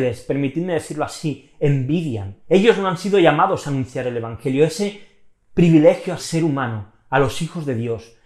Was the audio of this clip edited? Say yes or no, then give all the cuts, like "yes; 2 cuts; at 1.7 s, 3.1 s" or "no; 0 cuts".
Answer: yes; 2 cuts; at 2.4 s, 6.2 s